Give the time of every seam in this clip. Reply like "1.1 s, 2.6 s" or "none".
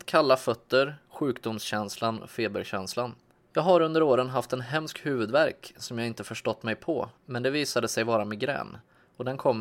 3.4 s, 7.2 s